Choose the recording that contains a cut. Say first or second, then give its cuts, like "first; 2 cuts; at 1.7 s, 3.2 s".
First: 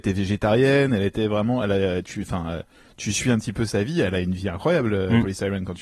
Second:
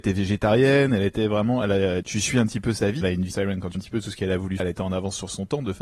second; 5 cuts; at 2.0 s, 3.0 s, 3.3 s, 3.7 s, 4.6 s